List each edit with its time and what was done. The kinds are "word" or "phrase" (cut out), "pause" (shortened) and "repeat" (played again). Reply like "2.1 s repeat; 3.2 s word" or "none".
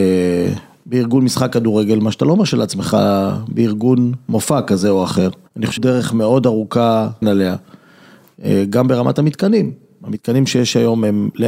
5.5 s pause; 5.8 s word; 7.2 s phrase